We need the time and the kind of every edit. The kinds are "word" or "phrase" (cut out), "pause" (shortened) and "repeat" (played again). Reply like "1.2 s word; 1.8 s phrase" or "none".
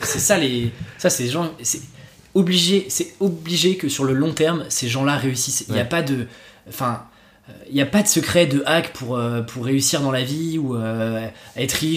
none